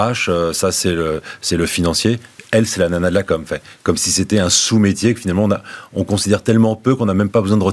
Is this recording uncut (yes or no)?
yes